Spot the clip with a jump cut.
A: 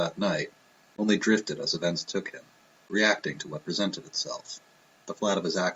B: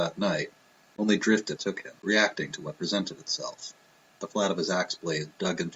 B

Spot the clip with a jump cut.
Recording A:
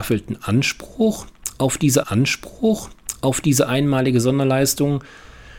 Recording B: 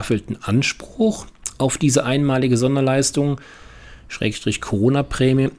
A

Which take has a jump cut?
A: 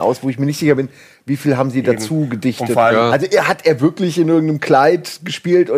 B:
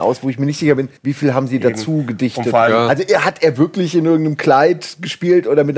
B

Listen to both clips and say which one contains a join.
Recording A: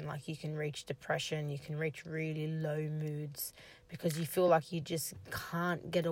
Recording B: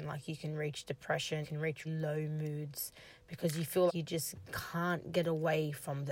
B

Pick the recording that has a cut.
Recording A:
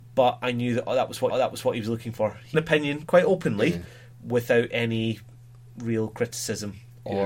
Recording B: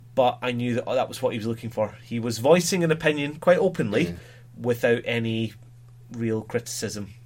A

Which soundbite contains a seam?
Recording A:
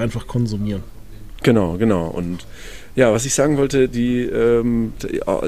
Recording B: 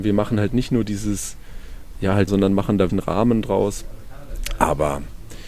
B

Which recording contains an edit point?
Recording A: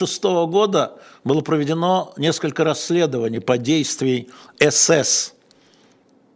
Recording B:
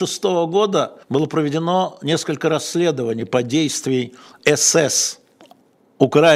B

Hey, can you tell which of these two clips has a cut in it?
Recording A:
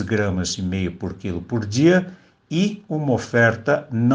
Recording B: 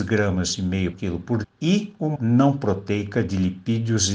B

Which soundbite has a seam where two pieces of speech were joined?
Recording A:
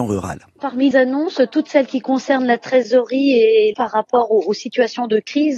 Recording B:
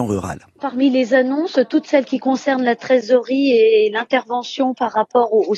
A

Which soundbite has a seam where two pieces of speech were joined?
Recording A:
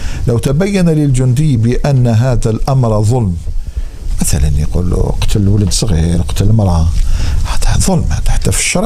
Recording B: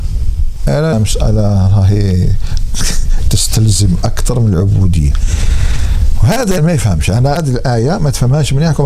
B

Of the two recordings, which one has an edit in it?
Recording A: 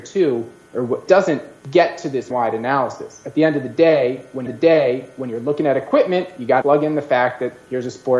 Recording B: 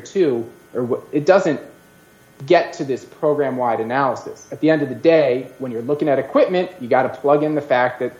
A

